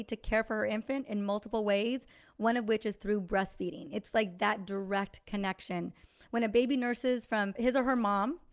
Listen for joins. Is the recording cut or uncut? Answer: uncut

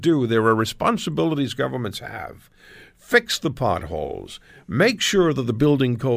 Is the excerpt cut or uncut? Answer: uncut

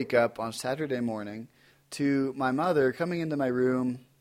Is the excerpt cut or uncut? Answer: uncut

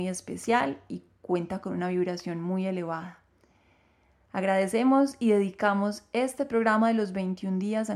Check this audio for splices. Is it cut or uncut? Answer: uncut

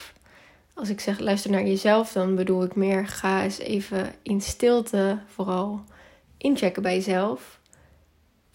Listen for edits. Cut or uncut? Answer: uncut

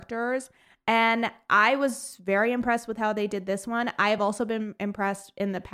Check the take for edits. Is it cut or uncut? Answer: uncut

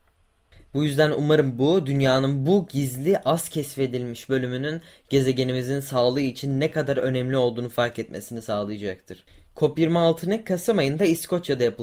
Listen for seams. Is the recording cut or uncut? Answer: uncut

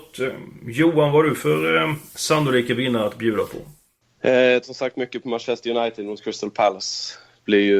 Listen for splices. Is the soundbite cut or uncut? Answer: cut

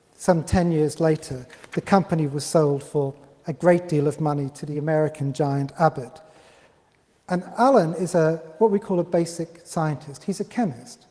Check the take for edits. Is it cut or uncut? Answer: uncut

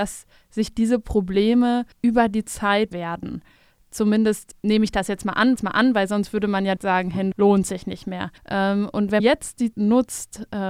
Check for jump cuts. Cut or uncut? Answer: cut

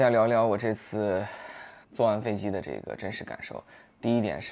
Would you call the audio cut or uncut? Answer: cut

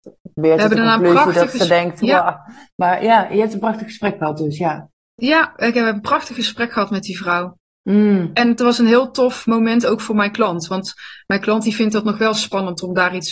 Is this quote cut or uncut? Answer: uncut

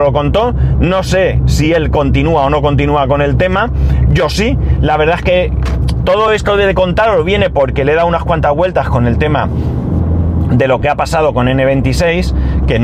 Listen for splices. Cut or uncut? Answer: uncut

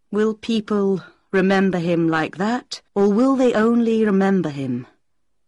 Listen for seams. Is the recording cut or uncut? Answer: cut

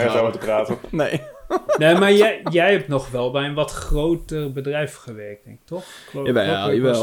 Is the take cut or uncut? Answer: uncut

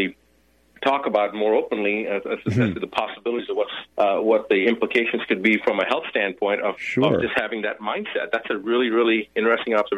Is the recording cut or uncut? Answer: cut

